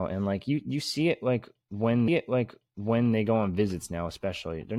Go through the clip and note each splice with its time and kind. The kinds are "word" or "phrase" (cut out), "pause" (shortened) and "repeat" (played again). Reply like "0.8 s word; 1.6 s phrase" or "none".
2.1 s repeat

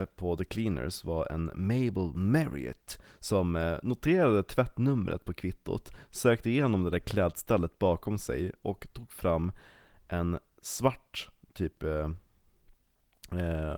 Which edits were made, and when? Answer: none

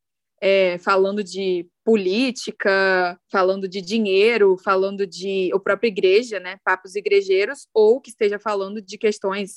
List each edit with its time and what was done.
3.2 s pause

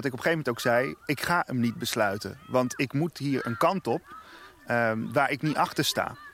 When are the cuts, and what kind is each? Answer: none

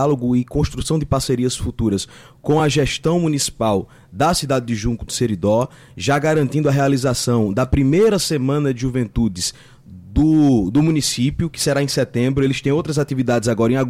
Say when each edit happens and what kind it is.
none

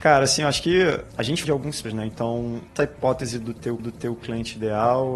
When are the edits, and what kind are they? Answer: 1.4 s phrase; 1.8 s word; 2.8 s word; 3.8 s repeat

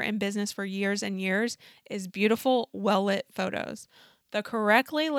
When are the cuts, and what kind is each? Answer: none

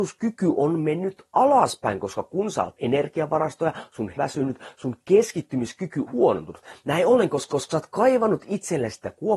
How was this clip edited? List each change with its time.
2.8 s phrase; 4.2 s phrase; 6.1 s word; 7.5 s repeat

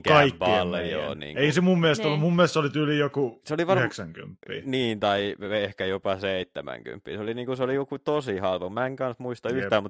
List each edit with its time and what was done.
none

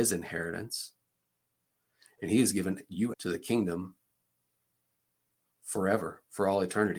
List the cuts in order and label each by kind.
3.1 s word

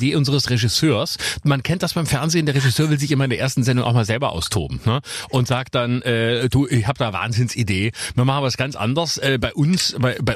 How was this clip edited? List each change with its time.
none

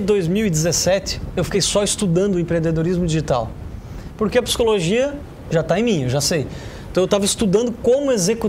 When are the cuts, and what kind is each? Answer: none

